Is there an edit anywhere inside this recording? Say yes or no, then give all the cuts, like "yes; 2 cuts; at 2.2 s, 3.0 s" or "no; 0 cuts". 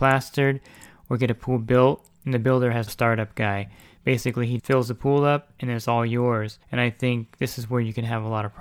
yes; 3 cuts; at 2.9 s, 4.6 s, 6.6 s